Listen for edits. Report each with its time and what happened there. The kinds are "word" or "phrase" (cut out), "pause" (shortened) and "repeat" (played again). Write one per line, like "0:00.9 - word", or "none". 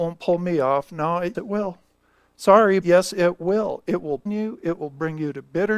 0:01.3 - word
0:02.8 - word
0:04.3 - word